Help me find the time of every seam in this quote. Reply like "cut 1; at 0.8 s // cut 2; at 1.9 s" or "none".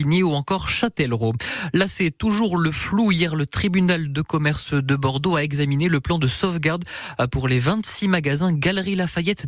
none